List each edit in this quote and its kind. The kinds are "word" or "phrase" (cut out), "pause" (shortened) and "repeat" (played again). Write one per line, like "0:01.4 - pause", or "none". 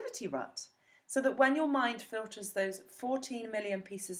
none